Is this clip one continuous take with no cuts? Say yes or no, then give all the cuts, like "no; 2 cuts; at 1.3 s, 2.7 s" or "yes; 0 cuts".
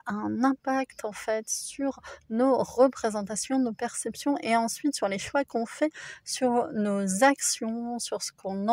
yes; 0 cuts